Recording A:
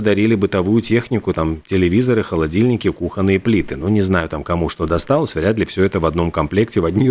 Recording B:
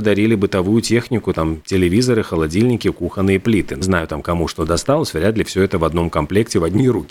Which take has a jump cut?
B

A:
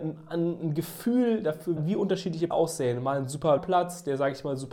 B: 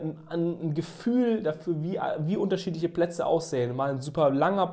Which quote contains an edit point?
A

